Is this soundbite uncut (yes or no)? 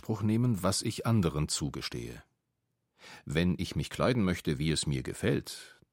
yes